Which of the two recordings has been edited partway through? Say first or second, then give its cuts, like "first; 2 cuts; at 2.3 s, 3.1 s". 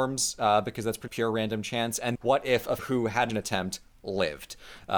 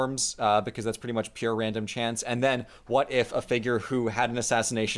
first; 4 cuts; at 1.1 s, 2.1 s, 2.8 s, 3.3 s